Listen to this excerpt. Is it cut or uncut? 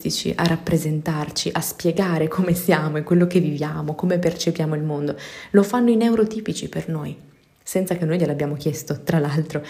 uncut